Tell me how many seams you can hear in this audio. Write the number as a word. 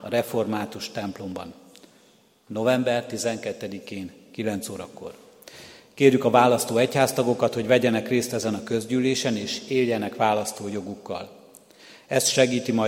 zero